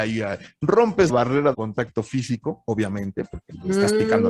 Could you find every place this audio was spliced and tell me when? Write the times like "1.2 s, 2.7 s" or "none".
1.1 s, 1.5 s